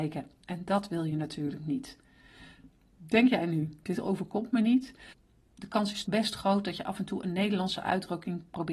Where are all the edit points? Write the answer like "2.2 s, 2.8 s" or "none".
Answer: 6.0 s